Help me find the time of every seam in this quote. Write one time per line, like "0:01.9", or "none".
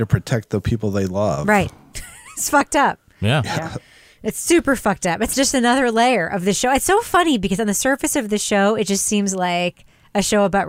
0:03.1